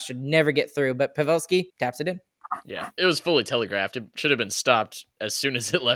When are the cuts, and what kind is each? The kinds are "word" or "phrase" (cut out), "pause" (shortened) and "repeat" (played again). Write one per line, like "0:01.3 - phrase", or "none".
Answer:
0:01.7 - pause
0:03.0 - word